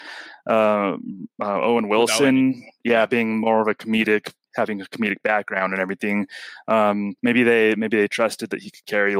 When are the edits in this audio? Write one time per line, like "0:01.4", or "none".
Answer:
0:07.2